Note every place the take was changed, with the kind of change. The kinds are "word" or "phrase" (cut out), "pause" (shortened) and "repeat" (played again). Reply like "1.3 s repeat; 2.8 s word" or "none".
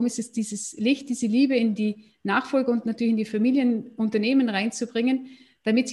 none